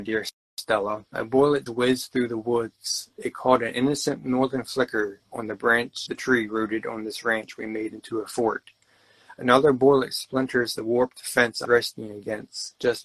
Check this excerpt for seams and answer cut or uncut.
cut